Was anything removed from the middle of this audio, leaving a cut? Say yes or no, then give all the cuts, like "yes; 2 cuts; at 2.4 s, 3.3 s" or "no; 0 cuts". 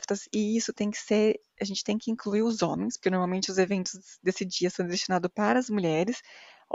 no; 0 cuts